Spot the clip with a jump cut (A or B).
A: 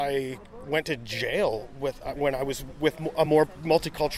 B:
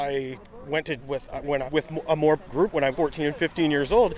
B